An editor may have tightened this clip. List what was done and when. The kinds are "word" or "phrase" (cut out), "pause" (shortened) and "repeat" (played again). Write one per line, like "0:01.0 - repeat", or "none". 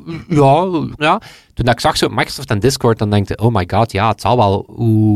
0:01.0 - word